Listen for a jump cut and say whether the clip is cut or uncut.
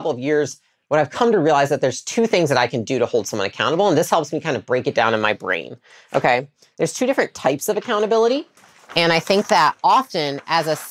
uncut